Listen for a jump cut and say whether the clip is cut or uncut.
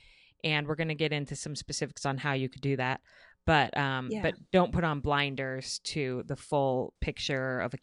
uncut